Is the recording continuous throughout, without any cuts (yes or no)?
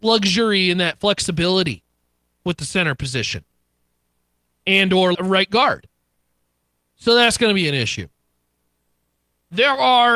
no